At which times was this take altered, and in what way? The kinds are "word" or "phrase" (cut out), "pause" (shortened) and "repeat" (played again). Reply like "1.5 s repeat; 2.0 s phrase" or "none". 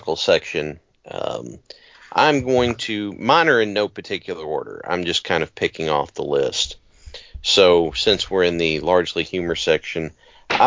none